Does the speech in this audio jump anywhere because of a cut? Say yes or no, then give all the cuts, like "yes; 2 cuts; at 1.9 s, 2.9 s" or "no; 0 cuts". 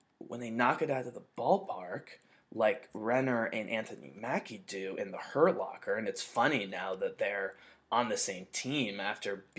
no; 0 cuts